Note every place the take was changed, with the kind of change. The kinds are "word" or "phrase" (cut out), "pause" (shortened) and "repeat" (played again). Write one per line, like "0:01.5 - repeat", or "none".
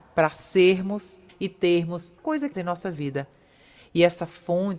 0:01.3 - word
0:02.2 - word
0:02.5 - word